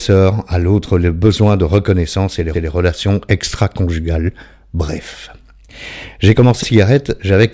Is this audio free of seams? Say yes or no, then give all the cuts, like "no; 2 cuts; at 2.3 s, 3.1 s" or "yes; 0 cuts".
no; 2 cuts; at 2.5 s, 6.6 s